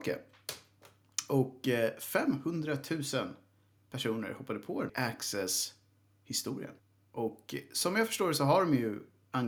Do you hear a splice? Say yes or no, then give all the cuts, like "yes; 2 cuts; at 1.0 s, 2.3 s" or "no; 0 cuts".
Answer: yes; 1 cut; at 4.9 s